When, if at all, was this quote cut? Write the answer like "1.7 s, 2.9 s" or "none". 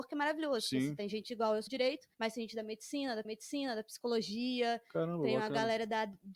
1.7 s, 2.1 s, 3.2 s